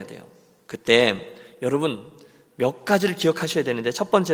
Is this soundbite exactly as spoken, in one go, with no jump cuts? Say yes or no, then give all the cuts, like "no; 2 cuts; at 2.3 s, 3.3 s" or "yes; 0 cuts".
yes; 0 cuts